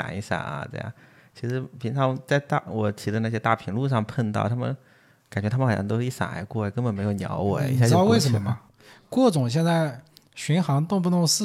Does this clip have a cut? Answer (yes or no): no